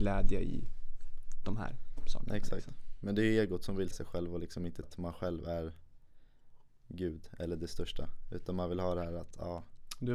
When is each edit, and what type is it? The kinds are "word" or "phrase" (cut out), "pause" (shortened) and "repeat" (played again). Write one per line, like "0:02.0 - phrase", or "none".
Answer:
0:03.9 - word
0:04.8 - word